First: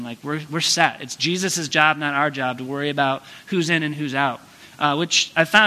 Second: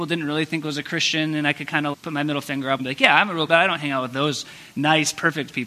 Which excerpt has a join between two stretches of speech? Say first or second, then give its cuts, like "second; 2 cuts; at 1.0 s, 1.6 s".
second; 3 cuts; at 1.9 s, 2.8 s, 3.5 s